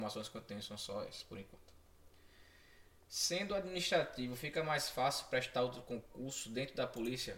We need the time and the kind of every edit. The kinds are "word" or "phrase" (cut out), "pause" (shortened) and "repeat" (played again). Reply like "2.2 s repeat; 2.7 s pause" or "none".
none